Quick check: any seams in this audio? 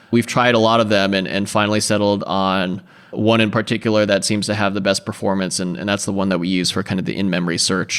no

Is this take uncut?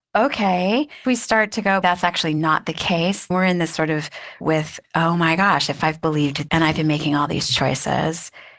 no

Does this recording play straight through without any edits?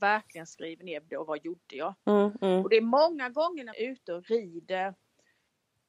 no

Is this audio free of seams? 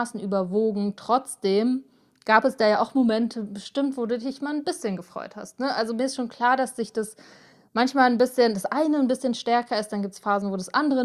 yes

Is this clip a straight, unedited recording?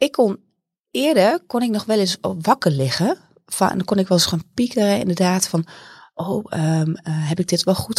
yes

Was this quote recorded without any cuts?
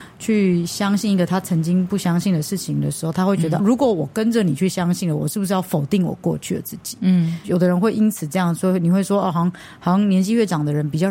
no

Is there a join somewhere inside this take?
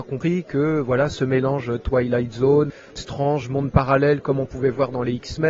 no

